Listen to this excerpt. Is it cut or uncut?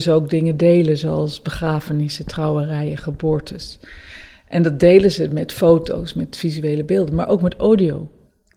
uncut